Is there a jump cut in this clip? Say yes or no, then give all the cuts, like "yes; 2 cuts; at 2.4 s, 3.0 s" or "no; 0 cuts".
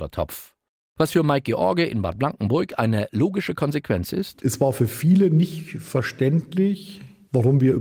no; 0 cuts